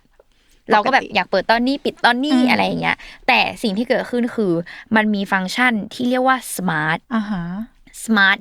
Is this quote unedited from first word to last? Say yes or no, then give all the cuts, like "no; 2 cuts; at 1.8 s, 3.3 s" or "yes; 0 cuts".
no; 1 cut; at 7.0 s